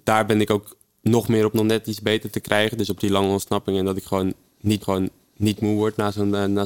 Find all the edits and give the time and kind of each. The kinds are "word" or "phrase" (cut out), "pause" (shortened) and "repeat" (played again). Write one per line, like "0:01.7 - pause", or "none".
0:01.5 - phrase
0:02.3 - word
0:04.8 - repeat

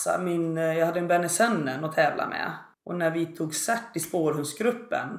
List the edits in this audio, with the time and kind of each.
0:02.7 - pause

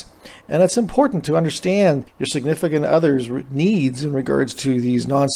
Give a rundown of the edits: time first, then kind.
0:02.1 - pause

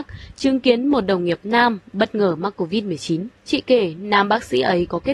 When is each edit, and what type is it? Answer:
0:03.4 - pause

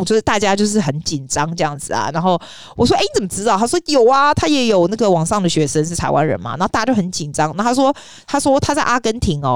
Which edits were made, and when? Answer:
none

